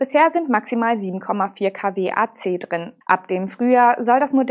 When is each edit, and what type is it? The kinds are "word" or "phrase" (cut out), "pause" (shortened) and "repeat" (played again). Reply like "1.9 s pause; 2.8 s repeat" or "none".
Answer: 3.0 s pause